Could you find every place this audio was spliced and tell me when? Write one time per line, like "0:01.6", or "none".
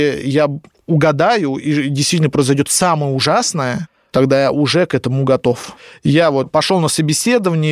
none